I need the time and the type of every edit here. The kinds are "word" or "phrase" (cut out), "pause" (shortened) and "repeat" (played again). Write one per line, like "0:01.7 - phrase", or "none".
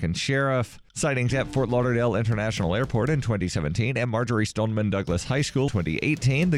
0:01.3 - word
0:05.7 - word